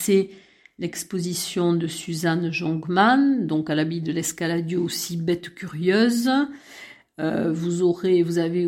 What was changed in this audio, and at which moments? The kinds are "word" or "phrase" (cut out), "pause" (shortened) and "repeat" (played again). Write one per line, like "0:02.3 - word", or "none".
none

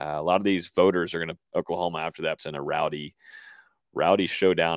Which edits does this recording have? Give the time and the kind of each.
0:01.4 - word
0:02.4 - word

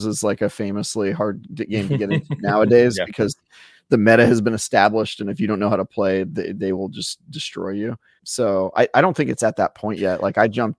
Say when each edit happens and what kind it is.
0:08.2 - word

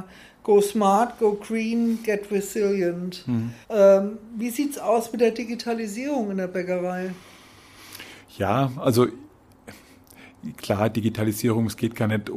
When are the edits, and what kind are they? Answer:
0:03.6 - pause

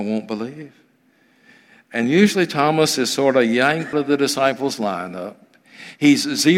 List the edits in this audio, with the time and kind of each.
0:03.9 - word

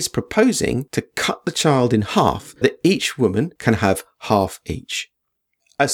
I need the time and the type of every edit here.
0:02.6 - word

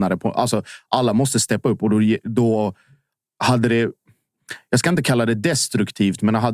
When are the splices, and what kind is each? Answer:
none

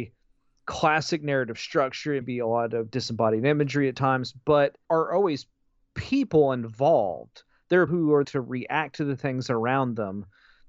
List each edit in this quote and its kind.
0:02.2 - word
0:04.8 - word
0:07.9 - word
0:08.2 - word

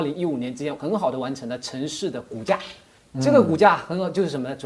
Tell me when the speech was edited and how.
none

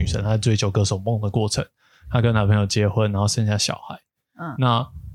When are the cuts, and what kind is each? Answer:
none

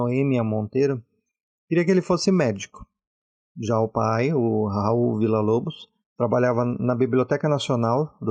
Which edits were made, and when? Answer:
none

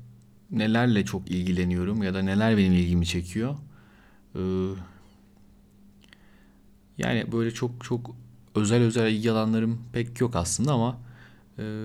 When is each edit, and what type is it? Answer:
none

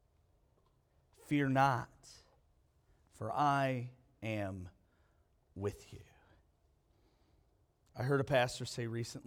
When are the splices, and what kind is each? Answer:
none

